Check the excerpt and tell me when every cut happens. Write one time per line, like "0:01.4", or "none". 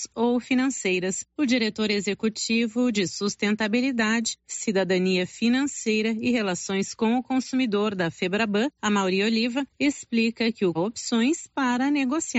0:10.7